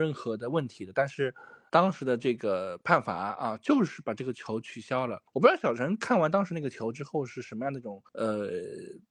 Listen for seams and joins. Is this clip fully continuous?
no; 3 cuts; at 1.7 s, 5.3 s, 8.1 s

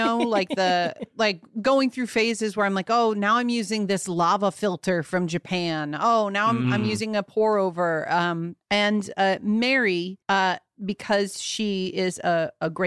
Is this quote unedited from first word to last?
no; 2 cuts; at 8.6 s, 10.2 s

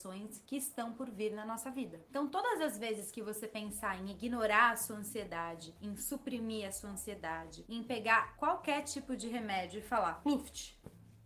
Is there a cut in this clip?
no; 0 cuts

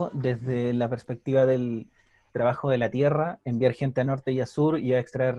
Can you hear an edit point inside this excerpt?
no; 0 cuts

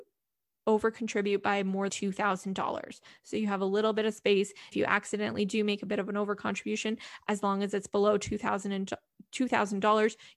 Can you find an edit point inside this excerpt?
yes; 2 cuts; at 1.9 s, 4.7 s

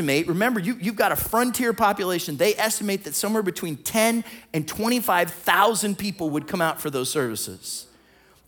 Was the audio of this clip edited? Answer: no; 0 cuts

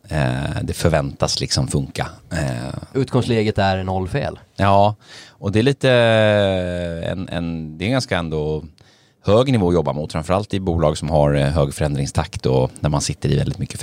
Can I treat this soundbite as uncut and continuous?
yes; 0 cuts

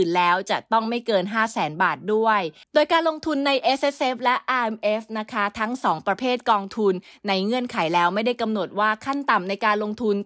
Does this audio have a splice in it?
no; 0 cuts

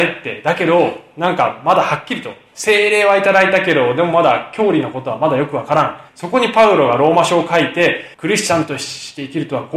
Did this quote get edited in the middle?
yes; 2 cuts; at 6.1 s, 8.1 s

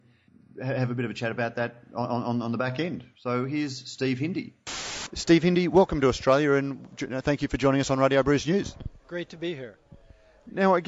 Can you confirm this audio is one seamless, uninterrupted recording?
yes; 0 cuts

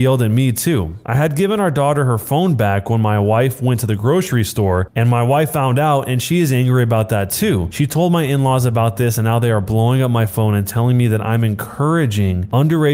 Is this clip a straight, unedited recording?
yes; 0 cuts

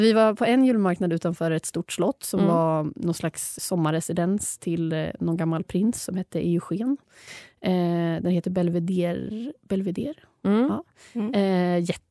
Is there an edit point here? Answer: yes; 1 cut; at 3.6 s

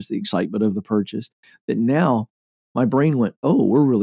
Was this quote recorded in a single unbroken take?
yes; 0 cuts

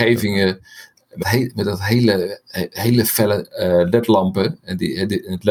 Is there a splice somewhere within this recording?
yes; 1 cut; at 1.2 s

